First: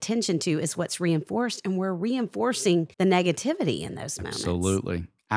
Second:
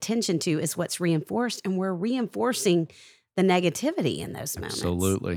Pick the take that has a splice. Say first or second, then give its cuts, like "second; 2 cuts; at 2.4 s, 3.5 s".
first; 1 cut; at 2.9 s